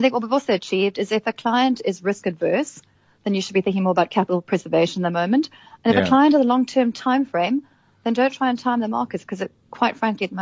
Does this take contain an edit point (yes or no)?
no